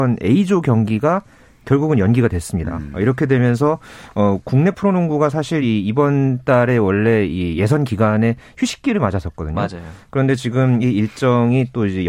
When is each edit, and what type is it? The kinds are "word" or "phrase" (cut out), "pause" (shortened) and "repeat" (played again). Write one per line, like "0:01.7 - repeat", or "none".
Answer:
none